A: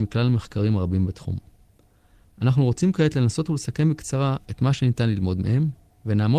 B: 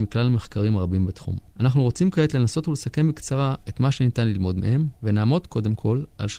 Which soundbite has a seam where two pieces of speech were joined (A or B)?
B